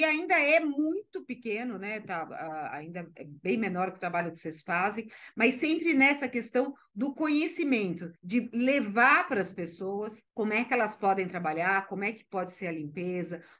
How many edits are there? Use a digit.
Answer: 2